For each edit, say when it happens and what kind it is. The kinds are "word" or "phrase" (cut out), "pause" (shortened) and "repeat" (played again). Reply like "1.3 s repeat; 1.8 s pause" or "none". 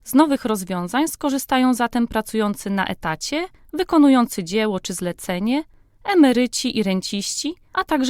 none